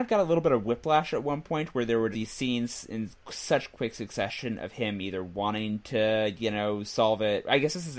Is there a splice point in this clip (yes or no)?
yes